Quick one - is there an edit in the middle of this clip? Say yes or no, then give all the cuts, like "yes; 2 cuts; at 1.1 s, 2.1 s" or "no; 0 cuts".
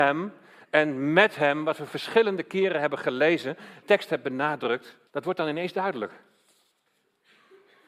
yes; 2 cuts; at 3.8 s, 5.1 s